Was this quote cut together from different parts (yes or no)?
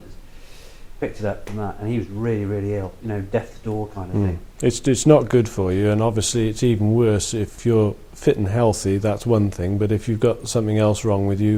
no